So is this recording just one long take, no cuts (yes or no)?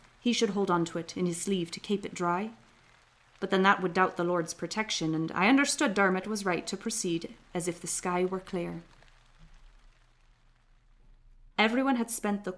yes